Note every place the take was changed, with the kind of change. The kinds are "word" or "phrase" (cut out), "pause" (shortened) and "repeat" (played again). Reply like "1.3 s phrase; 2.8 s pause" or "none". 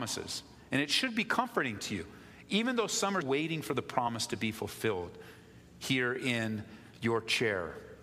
3.2 s word